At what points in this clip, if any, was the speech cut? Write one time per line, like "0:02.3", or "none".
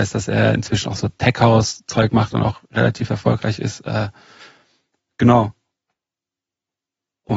none